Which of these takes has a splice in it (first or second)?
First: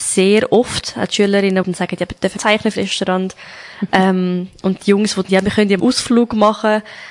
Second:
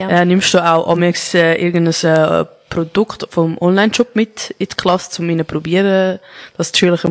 first